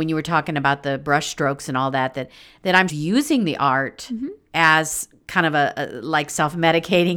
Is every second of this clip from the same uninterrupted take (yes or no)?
no